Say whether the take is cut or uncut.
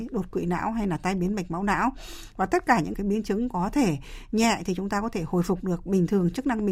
cut